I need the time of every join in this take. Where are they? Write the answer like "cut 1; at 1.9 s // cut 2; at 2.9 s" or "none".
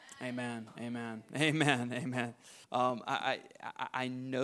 cut 1; at 2.6 s

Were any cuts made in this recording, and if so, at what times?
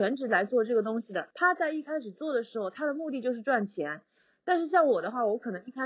cut 1; at 1.3 s

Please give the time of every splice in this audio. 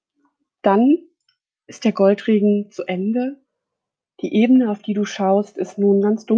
none

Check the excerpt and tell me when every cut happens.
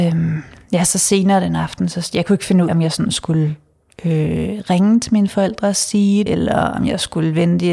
cut 1; at 2.7 s // cut 2; at 6.3 s

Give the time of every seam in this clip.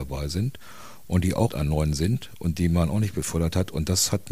cut 1; at 1.5 s

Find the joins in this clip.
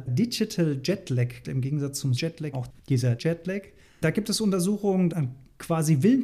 cut 1; at 1.4 s // cut 2; at 2.2 s // cut 3; at 2.5 s // cut 4; at 3.2 s // cut 5; at 3.9 s // cut 6; at 5.1 s

